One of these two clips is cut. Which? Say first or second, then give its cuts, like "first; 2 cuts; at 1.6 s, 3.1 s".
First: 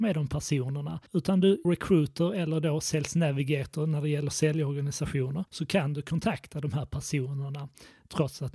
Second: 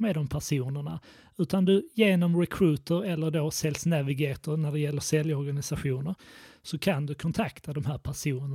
first; 3 cuts; at 1.1 s, 1.6 s, 5.5 s